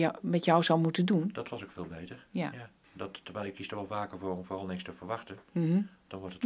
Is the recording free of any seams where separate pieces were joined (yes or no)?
no